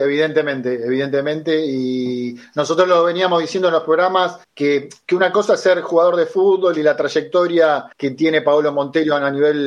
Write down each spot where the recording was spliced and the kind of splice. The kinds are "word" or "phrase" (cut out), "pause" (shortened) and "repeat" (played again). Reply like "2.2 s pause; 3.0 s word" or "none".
4.4 s pause; 7.9 s pause